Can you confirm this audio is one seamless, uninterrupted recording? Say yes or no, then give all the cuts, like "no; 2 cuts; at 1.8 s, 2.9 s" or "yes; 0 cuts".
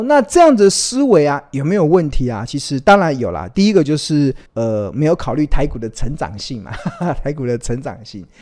no; 1 cut; at 4.5 s